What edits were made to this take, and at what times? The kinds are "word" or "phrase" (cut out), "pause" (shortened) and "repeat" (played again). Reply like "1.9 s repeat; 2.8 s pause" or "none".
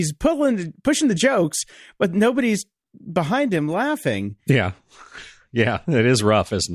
none